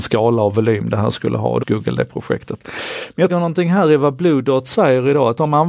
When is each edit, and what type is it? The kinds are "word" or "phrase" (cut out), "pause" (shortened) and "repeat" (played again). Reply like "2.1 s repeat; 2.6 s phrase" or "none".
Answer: 1.6 s phrase; 3.3 s phrase